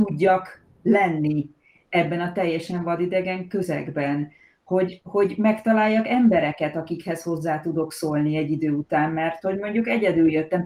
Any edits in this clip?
no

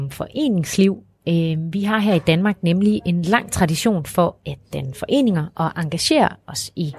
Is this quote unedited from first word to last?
yes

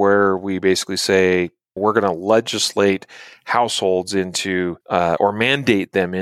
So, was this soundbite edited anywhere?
yes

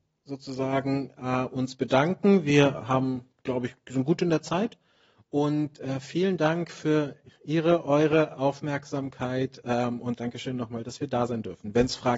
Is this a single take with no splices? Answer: yes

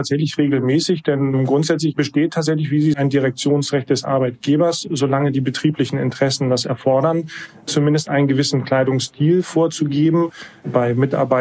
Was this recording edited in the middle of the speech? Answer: yes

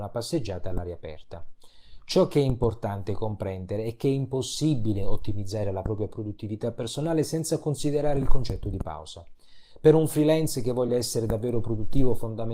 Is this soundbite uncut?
yes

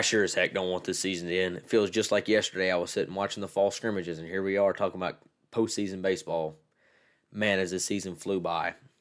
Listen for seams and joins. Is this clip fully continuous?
yes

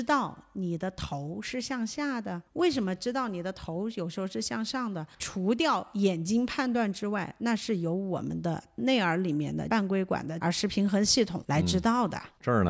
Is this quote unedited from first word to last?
no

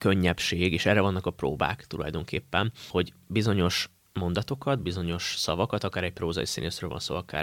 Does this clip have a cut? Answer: no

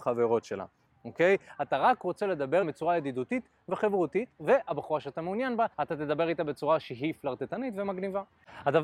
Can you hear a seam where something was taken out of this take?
yes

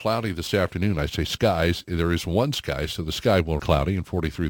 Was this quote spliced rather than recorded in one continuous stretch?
yes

